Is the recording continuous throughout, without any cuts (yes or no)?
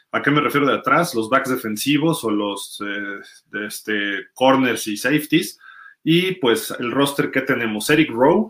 yes